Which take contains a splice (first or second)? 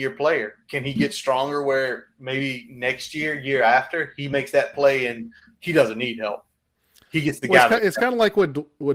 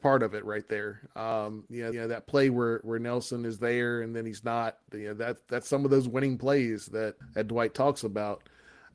second